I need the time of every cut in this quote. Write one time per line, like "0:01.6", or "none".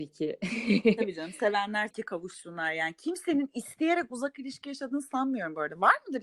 0:01.9